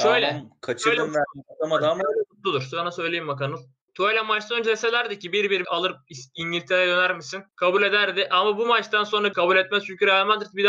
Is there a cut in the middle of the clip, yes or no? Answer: yes